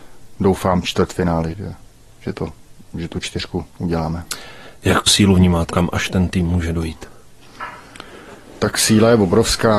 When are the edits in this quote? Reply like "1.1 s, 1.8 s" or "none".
1.5 s, 3.7 s, 5.1 s, 5.7 s